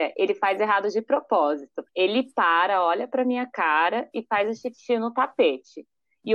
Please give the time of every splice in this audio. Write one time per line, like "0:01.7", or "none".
0:01.9

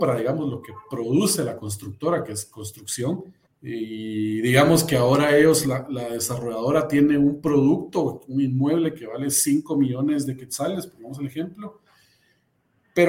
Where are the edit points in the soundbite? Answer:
0:03.5

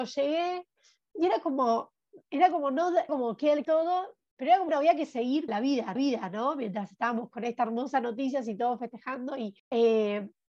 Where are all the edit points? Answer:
0:02.2
0:03.1
0:03.6
0:04.7
0:05.5
0:06.0
0:09.6

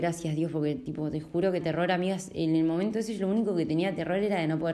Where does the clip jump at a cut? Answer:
0:01.6

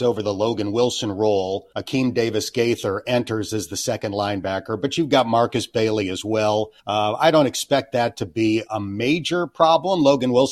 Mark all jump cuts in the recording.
0:01.7
0:06.8
0:08.7

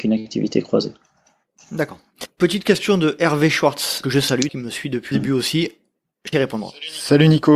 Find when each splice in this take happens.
0:02.3
0:04.0
0:04.5
0:05.1
0:06.0
0:06.3

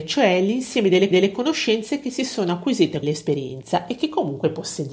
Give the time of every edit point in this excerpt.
0:01.1
0:03.0

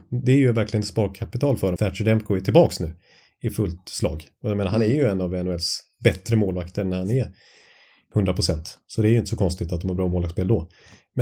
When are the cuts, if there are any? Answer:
0:01.8

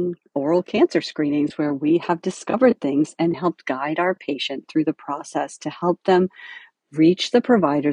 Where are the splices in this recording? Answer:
none

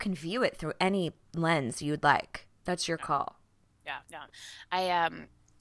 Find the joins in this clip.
0:04.0

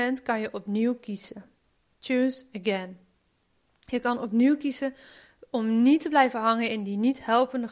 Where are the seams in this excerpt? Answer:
none

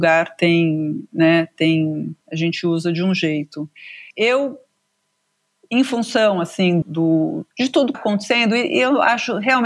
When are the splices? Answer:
0:02.2
0:06.8
0:07.5
0:07.9

